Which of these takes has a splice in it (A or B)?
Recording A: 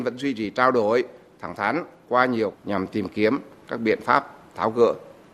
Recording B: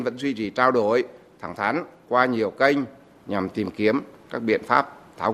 A